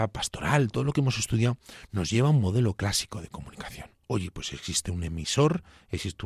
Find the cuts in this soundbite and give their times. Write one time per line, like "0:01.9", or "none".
0:04.0